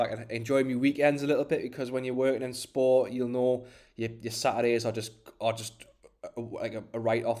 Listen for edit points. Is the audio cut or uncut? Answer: uncut